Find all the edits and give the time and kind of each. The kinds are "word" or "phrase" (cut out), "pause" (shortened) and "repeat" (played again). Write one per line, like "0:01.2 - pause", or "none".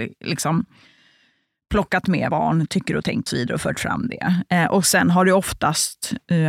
0:02.3 - word
0:03.3 - word

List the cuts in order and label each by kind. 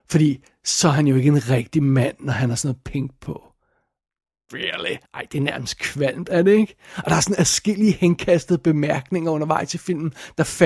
0:05.1 - pause

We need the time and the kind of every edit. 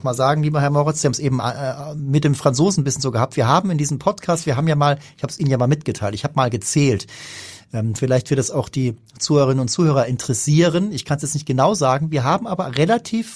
none

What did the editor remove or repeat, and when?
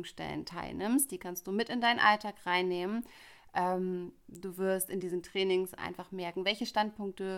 none

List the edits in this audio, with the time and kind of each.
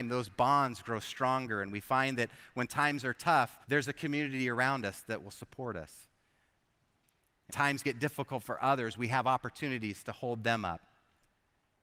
0:03.6 - pause
0:07.5 - word

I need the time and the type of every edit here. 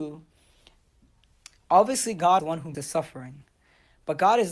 0:02.4 - word
0:02.7 - word

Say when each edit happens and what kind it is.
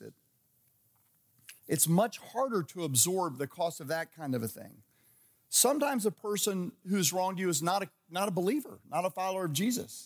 0:01.6 - pause

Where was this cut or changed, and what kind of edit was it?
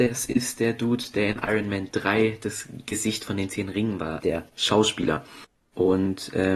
0:04.2 - word

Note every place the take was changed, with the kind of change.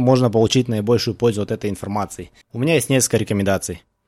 0:02.4 - pause

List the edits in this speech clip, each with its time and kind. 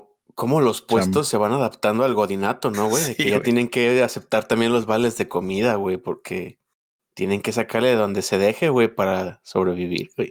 none

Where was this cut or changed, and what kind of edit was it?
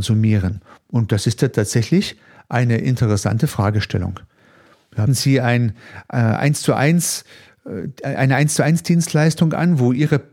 0:05.1 - word

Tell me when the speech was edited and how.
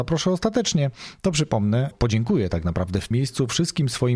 0:01.9 - word
0:03.1 - word

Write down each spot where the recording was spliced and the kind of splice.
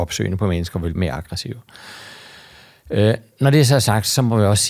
0:01.0 - word

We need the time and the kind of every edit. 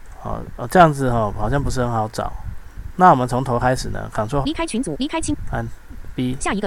0:04.4 - word

